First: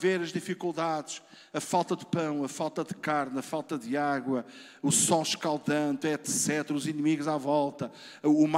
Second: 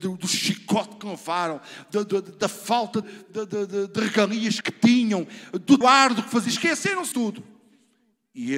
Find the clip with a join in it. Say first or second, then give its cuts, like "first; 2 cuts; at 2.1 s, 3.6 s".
second; 4 cuts; at 3.0 s, 4.6 s, 5.8 s, 7.1 s